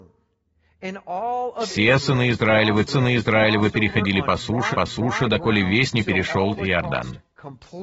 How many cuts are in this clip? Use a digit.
4